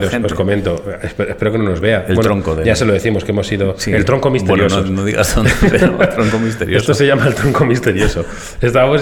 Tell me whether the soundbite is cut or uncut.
uncut